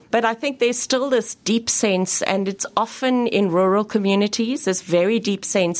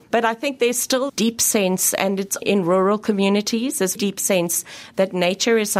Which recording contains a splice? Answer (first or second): second